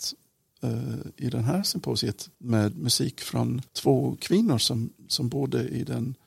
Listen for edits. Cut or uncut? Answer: cut